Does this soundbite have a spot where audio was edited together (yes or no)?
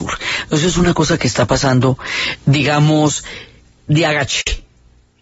no